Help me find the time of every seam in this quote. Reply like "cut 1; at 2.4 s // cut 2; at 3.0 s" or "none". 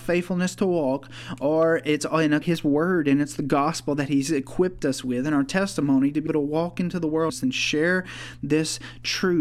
cut 1; at 2.4 s // cut 2; at 6.3 s // cut 3; at 7.3 s

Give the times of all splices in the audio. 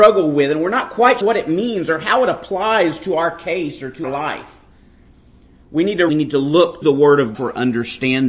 cut 1; at 1.2 s // cut 2; at 4.0 s // cut 3; at 6.1 s // cut 4; at 6.8 s // cut 5; at 7.3 s

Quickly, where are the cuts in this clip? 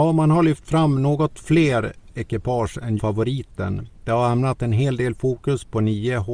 cut 1; at 3.0 s

